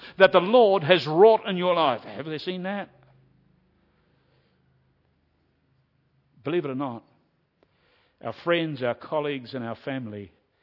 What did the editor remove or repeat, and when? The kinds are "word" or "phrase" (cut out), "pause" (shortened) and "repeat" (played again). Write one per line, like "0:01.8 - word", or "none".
none